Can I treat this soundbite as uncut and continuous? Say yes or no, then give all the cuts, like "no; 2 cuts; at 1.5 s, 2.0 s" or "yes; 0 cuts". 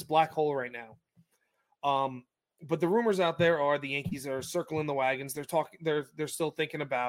yes; 0 cuts